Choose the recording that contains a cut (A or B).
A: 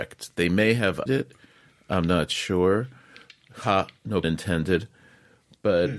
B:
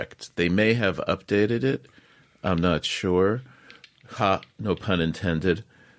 A